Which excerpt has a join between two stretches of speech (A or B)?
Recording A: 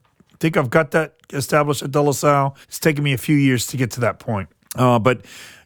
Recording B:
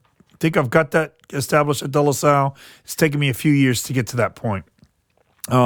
A